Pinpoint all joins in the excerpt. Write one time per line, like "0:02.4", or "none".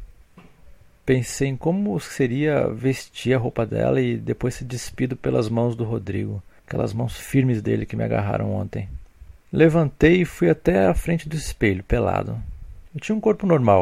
0:06.6
0:09.4